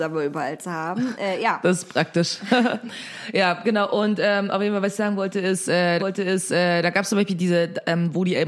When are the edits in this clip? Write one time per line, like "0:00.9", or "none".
0:06.0

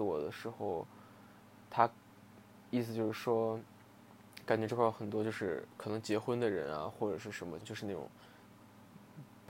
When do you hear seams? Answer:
0:07.6

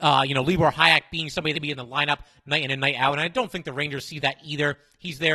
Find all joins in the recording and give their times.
0:01.5

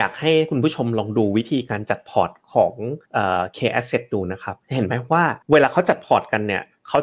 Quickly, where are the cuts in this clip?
0:03.1
0:04.6
0:05.4

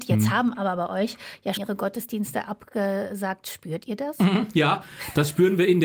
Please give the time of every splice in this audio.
0:01.6

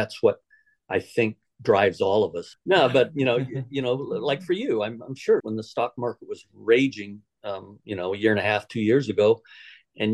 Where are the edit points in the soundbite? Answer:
0:05.4

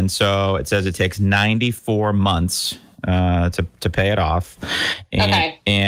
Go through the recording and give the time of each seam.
none

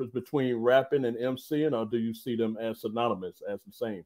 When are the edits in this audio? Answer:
none

